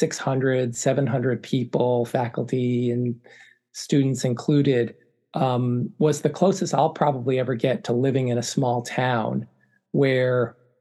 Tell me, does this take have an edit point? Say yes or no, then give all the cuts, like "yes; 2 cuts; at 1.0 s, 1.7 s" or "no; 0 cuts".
no; 0 cuts